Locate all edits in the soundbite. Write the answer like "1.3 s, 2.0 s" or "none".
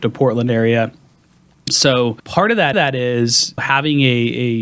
2.2 s, 2.7 s